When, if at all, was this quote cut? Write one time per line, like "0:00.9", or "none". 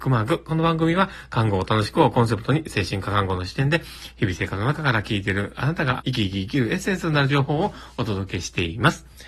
0:06.0